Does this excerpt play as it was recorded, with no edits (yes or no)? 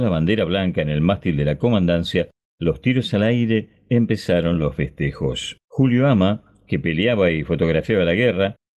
no